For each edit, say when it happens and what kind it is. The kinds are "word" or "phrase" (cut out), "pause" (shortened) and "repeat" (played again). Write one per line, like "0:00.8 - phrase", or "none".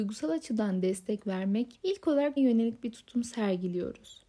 0:01.7 - word
0:02.4 - word

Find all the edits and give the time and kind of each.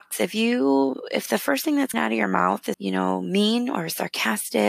0:01.9 - word
0:02.7 - word

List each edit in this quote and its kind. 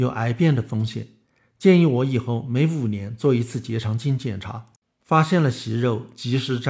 none

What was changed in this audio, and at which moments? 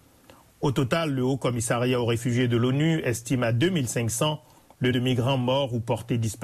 0:04.9 - word

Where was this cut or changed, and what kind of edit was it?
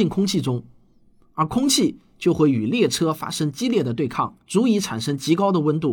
0:04.4 - pause

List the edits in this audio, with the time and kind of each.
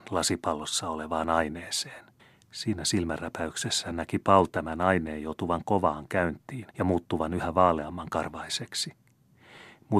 0:02.2 - pause
0:06.7 - pause

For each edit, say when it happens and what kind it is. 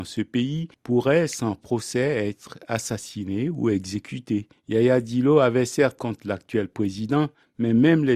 0:06.0 - phrase

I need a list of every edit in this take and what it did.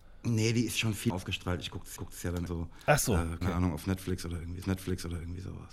0:01.1 - word
0:02.0 - repeat
0:02.5 - word
0:03.4 - word
0:04.6 - repeat

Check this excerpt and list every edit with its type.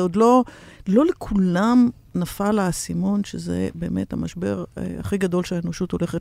0:04.7 - pause

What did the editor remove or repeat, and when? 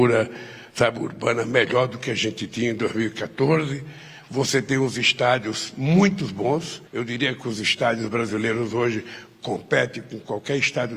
0:06.9 - pause

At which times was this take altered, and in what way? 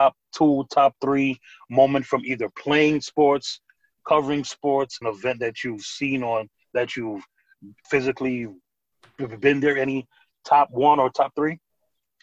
0:05.0 - word
0:07.8 - word

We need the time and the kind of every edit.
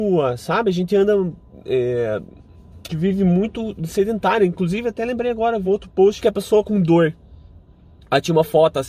0:02.9 - word
0:05.6 - word
0:06.2 - phrase
0:06.6 - word

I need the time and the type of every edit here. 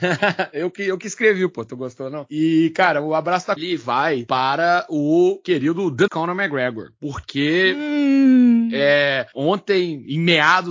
0:03.6 - phrase
0:06.1 - word

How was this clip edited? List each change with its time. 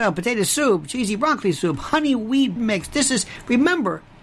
0:02.6 - word

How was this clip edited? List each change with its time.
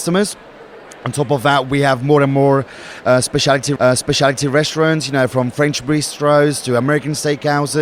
0:03.8 - repeat

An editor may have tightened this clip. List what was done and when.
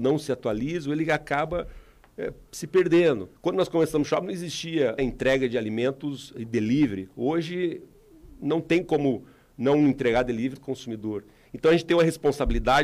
0:03.4 - pause
0:05.0 - word
0:10.6 - phrase

